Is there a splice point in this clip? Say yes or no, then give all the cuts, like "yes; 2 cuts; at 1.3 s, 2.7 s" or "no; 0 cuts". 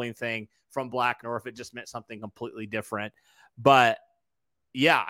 yes; 1 cut; at 1.2 s